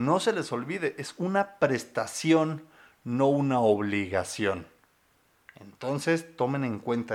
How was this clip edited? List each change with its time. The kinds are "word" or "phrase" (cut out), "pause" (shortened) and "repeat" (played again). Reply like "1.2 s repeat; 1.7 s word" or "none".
none